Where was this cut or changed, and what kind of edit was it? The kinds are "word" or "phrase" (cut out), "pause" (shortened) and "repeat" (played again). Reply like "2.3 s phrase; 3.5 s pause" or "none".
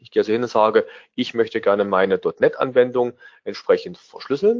none

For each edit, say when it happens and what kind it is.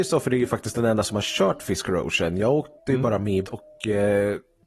2.8 s pause; 3.4 s word

